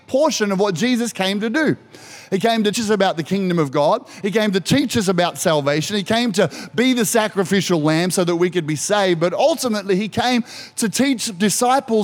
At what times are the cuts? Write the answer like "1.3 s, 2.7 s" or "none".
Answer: 2.7 s